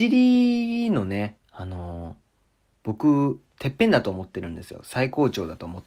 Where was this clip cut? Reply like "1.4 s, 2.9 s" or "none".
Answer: 1.4 s, 3.5 s